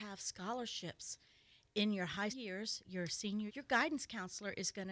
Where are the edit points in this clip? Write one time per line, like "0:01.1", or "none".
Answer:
0:02.3
0:02.8
0:03.5